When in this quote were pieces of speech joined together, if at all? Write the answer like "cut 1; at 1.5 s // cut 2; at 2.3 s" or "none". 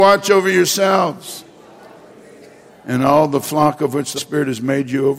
cut 1; at 4.2 s